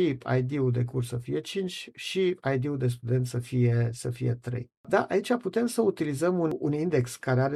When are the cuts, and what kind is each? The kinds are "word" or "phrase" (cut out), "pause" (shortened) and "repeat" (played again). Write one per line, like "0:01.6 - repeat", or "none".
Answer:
none

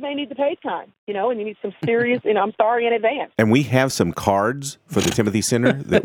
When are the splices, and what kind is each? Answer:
none

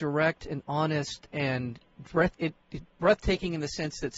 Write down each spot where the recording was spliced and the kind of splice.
0:02.4 - word
0:02.9 - pause

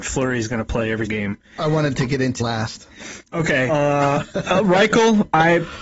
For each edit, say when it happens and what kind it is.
0:01.1 - word
0:02.4 - word
0:03.7 - word

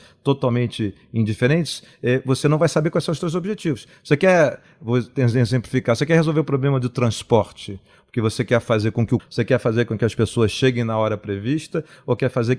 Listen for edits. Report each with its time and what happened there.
0:09.2 - phrase

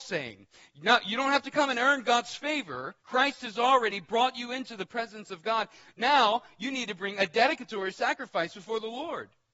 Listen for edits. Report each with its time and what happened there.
0:03.0 - pause

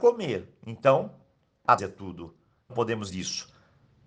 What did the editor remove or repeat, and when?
0:01.8 - word
0:02.7 - word
0:03.1 - word

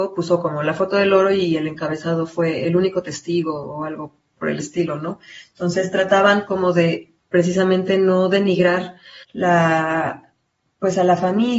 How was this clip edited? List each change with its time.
0:07.2 - pause
0:09.2 - pause

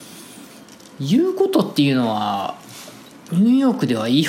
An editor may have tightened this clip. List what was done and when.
none

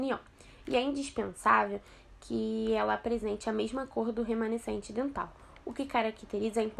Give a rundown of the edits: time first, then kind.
none

